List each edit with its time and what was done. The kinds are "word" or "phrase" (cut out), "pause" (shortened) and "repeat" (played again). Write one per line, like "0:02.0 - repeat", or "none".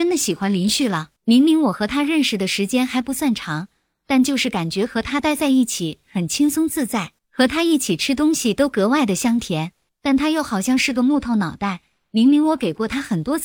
0:01.2 - pause
0:07.2 - pause
0:09.9 - pause